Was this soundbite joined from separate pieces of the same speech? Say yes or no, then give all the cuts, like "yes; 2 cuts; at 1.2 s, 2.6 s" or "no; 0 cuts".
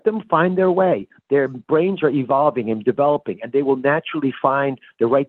no; 0 cuts